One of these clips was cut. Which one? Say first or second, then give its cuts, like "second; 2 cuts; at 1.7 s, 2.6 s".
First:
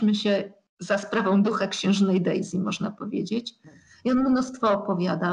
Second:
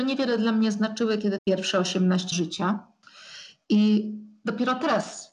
second; 2 cuts; at 1.4 s, 2.3 s